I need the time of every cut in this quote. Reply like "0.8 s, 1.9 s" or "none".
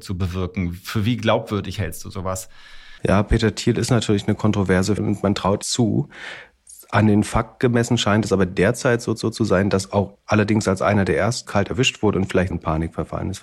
3.0 s, 5.0 s, 5.6 s, 9.2 s, 10.1 s, 11.4 s, 12.5 s